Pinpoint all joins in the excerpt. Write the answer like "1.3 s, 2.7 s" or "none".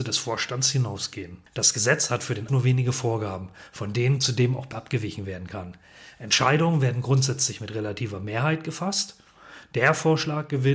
1.5 s, 2.5 s, 4.7 s

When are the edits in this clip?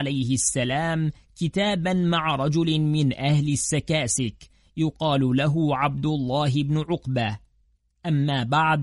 none

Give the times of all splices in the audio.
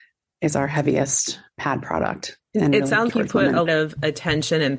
3.1 s, 3.7 s

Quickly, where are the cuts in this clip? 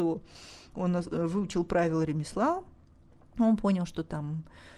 none

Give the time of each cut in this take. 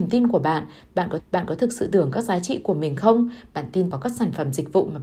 1.2 s, 1.9 s, 3.9 s

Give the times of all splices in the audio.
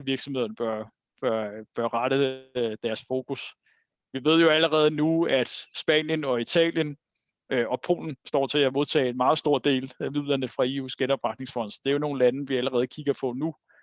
10.5 s

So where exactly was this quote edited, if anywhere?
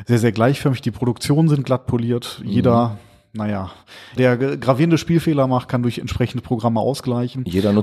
4.2 s

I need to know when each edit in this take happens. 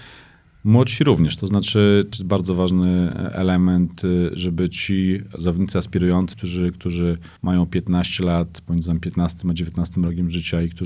2.1 s, 6.3 s, 7.4 s

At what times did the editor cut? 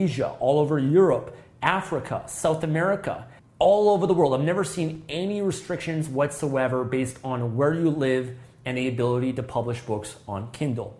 3.4 s

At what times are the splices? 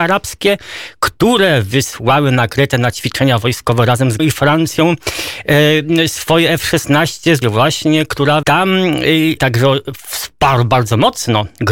4.2 s, 7.4 s, 8.4 s, 9.4 s

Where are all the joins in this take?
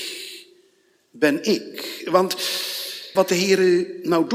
3.2 s

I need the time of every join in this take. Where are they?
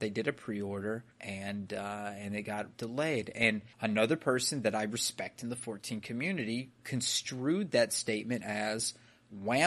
1.1 s, 3.7 s, 6.8 s

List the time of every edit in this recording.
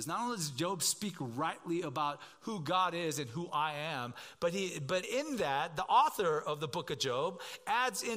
5.0 s

